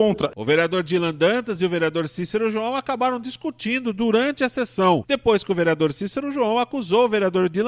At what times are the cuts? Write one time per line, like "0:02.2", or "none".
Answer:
none